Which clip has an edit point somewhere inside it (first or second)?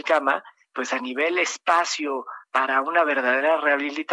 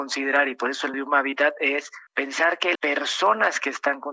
second